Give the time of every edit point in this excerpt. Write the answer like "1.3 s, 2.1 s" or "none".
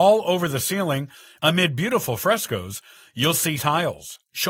3.6 s